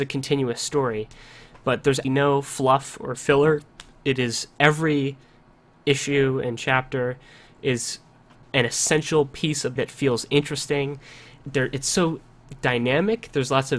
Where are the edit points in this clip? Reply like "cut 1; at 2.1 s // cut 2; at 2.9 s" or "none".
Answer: cut 1; at 2.0 s // cut 2; at 8.4 s // cut 3; at 9.8 s // cut 4; at 11.4 s